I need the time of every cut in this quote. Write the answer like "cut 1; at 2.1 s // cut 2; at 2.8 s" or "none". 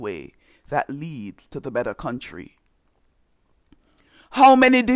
none